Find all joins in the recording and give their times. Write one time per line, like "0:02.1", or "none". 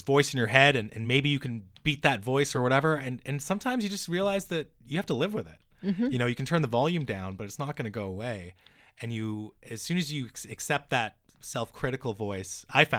none